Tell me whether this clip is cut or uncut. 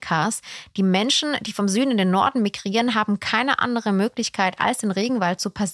uncut